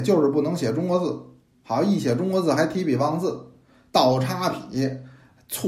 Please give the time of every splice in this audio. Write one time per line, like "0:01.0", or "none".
none